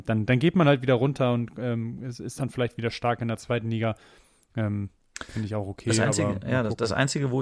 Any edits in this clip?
no; 0 cuts

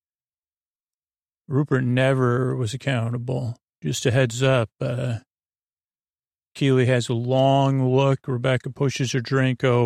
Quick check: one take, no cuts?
yes; 0 cuts

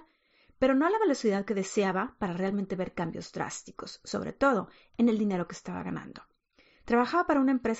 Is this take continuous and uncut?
yes; 0 cuts

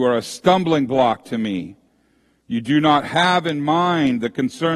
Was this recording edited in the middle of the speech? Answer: no; 0 cuts

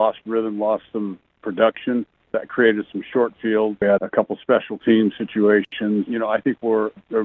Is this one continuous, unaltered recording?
no; 1 cut; at 4.0 s

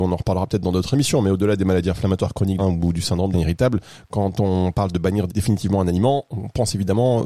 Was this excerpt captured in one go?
no; 3 cuts; at 2.6 s, 3.3 s, 5.3 s

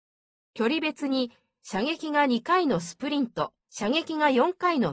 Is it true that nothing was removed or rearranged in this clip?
no; 1 cut; at 3.6 s

